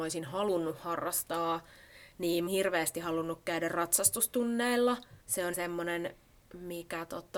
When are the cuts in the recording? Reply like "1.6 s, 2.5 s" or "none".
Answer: 2.5 s, 5.2 s, 5.5 s